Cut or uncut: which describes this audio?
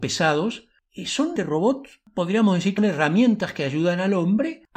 cut